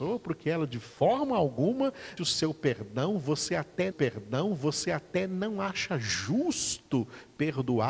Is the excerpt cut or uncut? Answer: cut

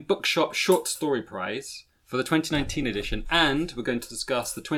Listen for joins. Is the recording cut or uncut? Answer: uncut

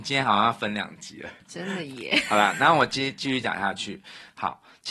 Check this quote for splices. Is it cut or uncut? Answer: cut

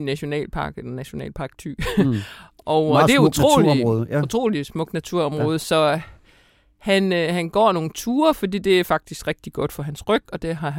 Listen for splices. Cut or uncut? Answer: uncut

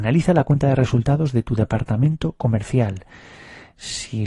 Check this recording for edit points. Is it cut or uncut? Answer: uncut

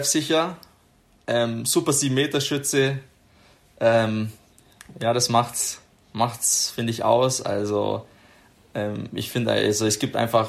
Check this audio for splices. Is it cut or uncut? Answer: uncut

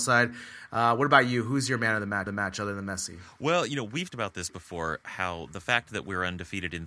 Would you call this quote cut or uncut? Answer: cut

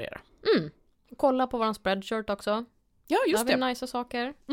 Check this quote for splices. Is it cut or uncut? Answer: uncut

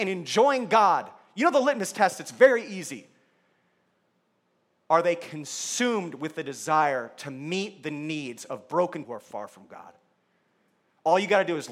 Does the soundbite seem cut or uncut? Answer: cut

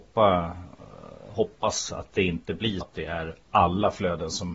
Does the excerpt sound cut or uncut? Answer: cut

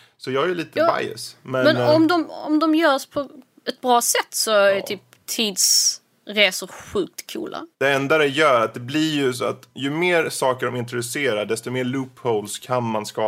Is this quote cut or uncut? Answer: cut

